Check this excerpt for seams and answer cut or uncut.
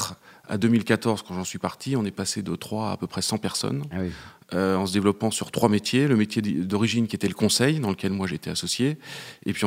uncut